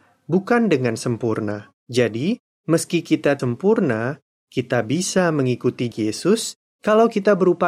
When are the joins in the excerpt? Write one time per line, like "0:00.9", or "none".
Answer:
0:01.8
0:03.4
0:05.9